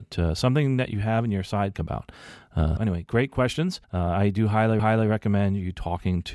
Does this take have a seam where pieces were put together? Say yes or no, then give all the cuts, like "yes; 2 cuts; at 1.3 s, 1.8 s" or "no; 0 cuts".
yes; 4 cuts; at 1.7 s, 2.8 s, 3.8 s, 4.8 s